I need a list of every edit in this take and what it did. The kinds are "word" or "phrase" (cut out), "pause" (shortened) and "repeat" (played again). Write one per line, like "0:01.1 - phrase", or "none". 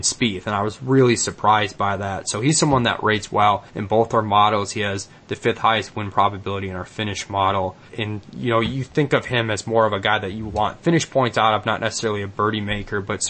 0:03.7 - pause
0:07.9 - word